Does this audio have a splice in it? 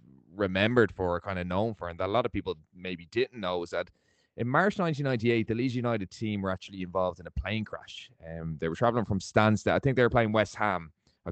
no; 0 cuts

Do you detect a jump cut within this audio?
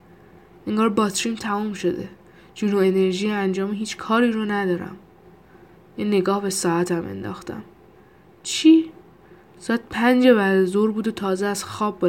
no; 0 cuts

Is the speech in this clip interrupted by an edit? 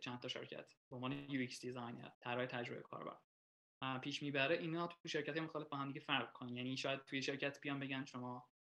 yes; 1 cut; at 2.1 s

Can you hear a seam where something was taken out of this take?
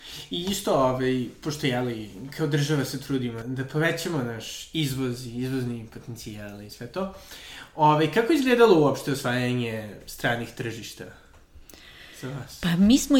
yes; 1 cut; at 3.4 s

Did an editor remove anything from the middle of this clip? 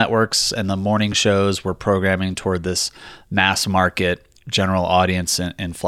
no; 0 cuts

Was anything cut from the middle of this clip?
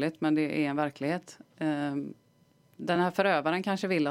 no; 0 cuts

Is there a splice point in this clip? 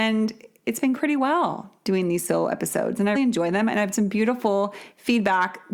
yes; 3 cuts; at 0.9 s, 3.1 s, 3.9 s

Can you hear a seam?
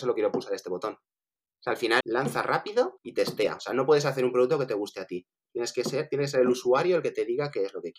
yes; 2 cuts; at 2.0 s, 3.0 s

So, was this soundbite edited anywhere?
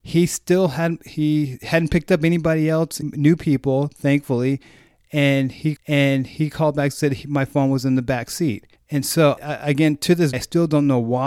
yes; 5 cuts; at 3.0 s, 5.8 s, 8.8 s, 9.4 s, 10.3 s

